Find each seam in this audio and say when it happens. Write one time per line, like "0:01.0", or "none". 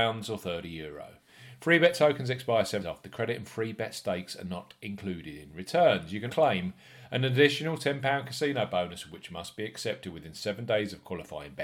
0:02.8
0:06.3

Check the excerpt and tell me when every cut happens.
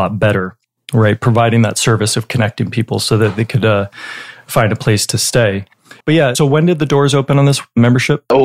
0:06.0

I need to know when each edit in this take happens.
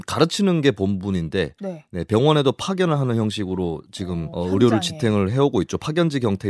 0:04.3

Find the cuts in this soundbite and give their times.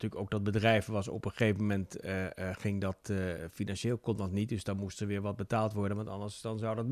none

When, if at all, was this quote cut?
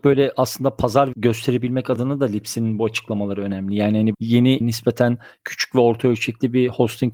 0:01.1
0:04.1
0:04.6

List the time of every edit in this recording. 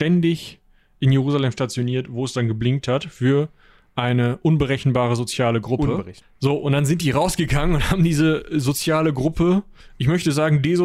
none

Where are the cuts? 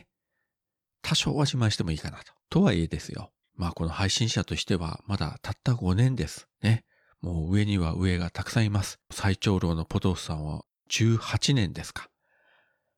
0:02.4
0:03.4
0:06.5
0:09.0

